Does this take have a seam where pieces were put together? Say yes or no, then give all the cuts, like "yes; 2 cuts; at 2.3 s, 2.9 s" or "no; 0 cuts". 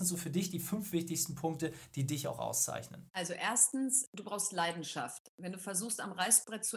yes; 1 cut; at 3.1 s